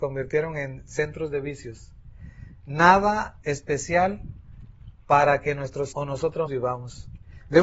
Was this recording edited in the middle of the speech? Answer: yes; 3 cuts; at 3.4 s, 5.9 s, 6.5 s

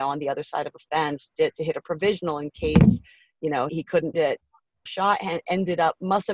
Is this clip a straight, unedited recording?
no; 4 cuts; at 1.3 s, 3.7 s, 4.1 s, 4.9 s

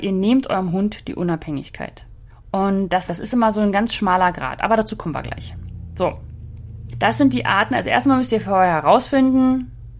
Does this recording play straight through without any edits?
no; 3 cuts; at 2.3 s, 3.1 s, 6.9 s

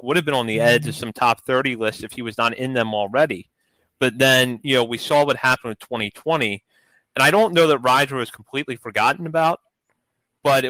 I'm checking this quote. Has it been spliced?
no; 0 cuts

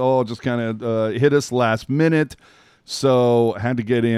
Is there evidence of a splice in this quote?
no; 0 cuts

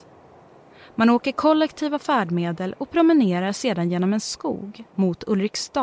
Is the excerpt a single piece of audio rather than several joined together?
yes; 0 cuts

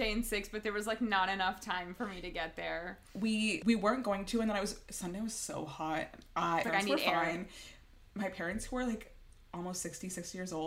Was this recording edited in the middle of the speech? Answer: yes; 2 cuts; at 3.6 s, 6.6 s

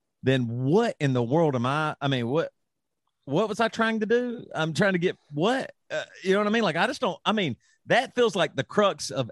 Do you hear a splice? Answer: no; 0 cuts

